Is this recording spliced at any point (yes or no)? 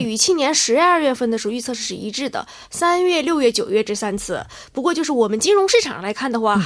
no